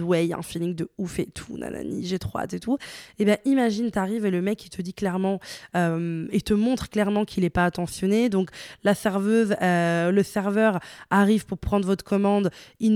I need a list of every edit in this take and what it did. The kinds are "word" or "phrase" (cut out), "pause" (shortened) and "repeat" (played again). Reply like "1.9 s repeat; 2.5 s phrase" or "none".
none